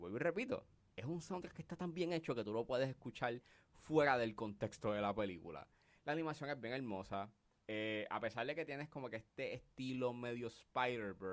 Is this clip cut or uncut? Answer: uncut